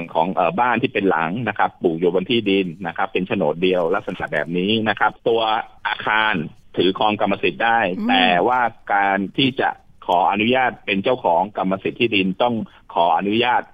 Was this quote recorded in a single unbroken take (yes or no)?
no